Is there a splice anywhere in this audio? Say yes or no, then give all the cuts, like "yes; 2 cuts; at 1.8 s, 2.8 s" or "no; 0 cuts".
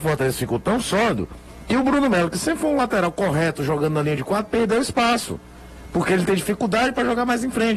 no; 0 cuts